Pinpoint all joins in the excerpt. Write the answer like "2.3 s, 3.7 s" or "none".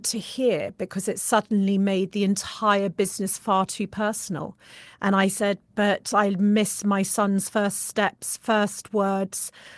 5.7 s